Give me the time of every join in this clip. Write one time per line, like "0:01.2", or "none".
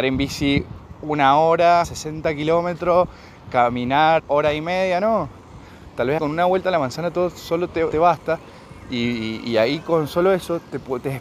0:01.8
0:04.2
0:06.2
0:07.9